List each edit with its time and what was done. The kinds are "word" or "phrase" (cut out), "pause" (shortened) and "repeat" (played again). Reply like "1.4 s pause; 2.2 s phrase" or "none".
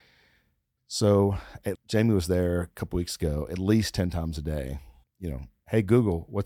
1.8 s word; 5.0 s pause